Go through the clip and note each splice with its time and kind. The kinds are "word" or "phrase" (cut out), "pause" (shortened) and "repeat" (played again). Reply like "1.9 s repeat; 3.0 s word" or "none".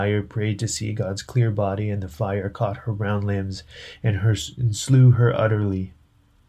none